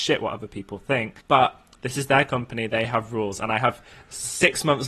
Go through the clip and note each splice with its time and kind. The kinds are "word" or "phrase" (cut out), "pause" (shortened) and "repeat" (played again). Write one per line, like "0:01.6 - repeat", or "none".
0:01.2 - pause